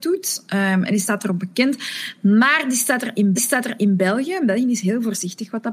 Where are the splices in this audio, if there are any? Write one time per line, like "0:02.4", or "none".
0:03.4